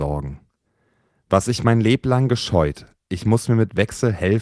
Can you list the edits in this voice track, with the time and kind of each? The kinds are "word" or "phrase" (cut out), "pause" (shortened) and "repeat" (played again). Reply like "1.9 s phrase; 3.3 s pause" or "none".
none